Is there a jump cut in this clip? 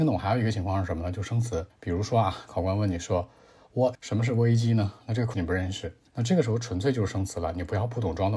yes; 4 cuts; at 1.7 s, 3.9 s, 5.3 s, 6.1 s

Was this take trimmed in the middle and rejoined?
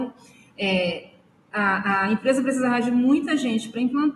no; 0 cuts

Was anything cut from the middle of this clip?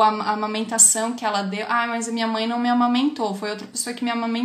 no; 0 cuts

